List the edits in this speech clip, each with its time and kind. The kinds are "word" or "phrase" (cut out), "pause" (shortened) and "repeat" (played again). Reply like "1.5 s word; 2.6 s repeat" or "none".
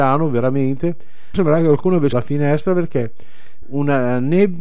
1.3 s word; 2.1 s word; 3.6 s word